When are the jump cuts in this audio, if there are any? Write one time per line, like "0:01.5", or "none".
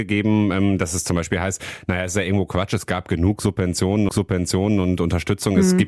0:04.1